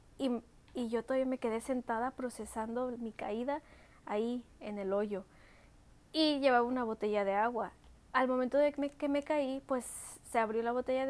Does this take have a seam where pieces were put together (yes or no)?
no